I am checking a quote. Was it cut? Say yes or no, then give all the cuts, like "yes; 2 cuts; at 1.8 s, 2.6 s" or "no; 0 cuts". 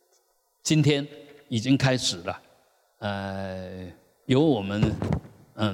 no; 0 cuts